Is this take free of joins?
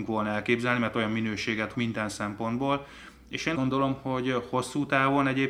no; 2 cuts; at 1.7 s, 3.5 s

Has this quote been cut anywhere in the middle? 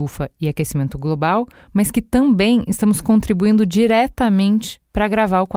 no; 0 cuts

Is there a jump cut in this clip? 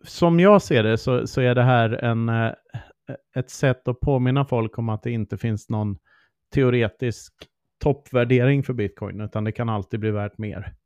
no; 0 cuts

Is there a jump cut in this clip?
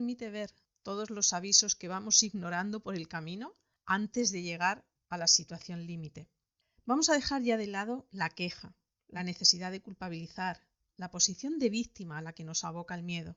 no; 0 cuts

